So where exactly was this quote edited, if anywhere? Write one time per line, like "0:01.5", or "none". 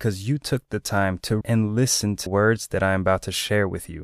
0:01.4
0:02.3